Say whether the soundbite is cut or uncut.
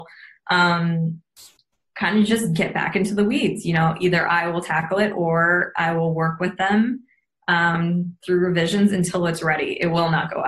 uncut